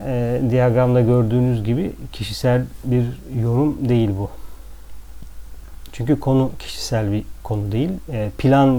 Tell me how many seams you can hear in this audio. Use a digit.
0